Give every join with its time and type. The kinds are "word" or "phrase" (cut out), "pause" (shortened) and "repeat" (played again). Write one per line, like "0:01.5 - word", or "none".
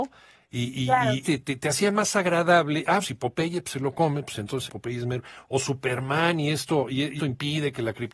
0:01.2 - phrase
0:03.0 - word
0:04.7 - phrase
0:07.2 - word